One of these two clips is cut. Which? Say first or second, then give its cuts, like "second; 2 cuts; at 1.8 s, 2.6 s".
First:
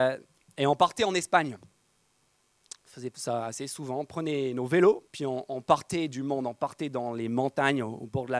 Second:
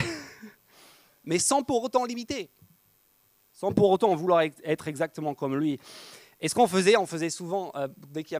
first; 1 cut; at 5.1 s